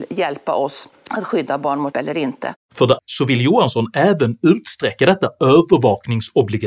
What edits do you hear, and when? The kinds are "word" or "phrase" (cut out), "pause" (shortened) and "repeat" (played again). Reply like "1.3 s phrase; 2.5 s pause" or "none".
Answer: 0.9 s pause; 1.9 s word; 2.6 s pause; 3.0 s word

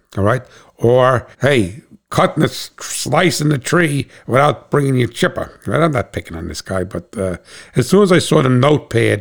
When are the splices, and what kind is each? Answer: 1.3 s pause

